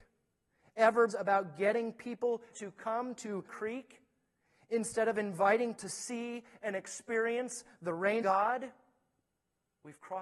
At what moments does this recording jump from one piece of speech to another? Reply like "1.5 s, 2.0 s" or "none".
1.1 s, 2.5 s, 3.5 s, 5.8 s, 8.2 s